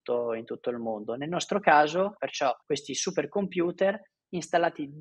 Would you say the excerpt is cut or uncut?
cut